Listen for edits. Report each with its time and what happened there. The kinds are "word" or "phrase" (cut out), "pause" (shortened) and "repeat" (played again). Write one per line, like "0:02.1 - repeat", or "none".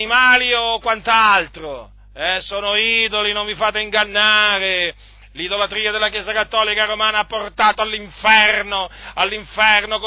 none